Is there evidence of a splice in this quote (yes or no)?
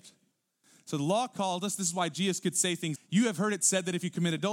yes